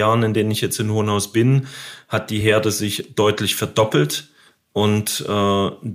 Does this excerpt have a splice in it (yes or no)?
no